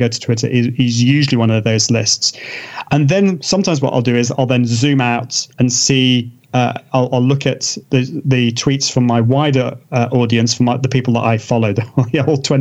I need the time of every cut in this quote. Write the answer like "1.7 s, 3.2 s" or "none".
5.5 s, 7.8 s, 9.8 s